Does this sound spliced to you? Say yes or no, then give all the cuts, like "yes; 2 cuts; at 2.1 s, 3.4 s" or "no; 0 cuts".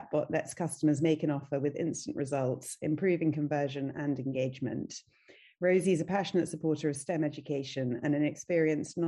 no; 0 cuts